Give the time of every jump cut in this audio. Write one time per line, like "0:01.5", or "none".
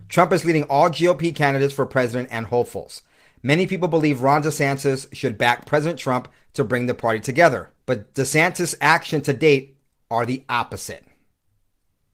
0:07.8